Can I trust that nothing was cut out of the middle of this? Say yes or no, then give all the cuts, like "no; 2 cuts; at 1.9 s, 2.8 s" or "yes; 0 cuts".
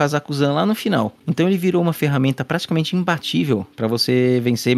yes; 0 cuts